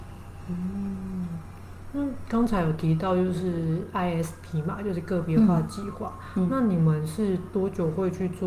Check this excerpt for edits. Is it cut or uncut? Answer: uncut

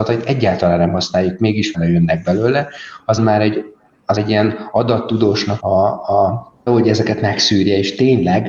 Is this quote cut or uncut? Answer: cut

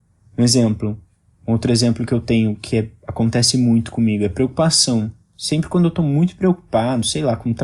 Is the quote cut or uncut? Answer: uncut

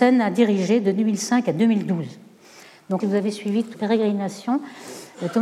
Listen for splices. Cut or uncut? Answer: cut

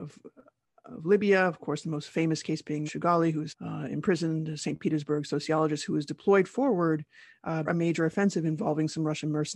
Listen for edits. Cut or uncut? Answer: cut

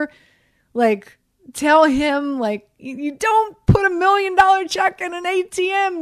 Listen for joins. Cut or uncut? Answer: uncut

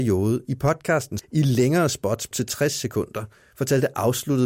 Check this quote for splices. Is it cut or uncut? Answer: cut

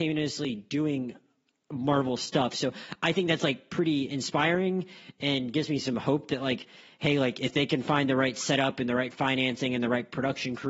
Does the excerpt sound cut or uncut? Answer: uncut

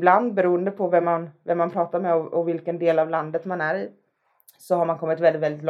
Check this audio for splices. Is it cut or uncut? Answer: uncut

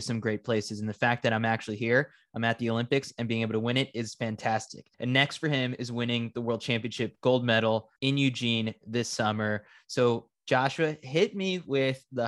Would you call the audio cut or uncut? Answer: cut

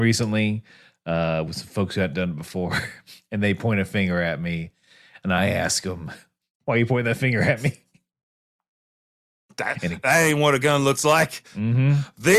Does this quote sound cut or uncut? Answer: uncut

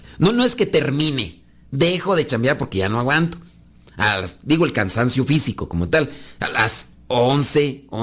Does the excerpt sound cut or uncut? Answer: uncut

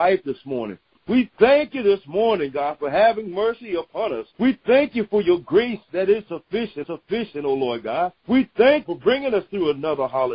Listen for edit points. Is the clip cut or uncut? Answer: cut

